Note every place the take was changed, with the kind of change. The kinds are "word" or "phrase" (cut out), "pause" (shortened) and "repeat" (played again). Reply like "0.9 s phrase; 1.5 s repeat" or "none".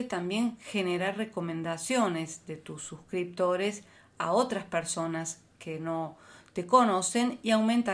none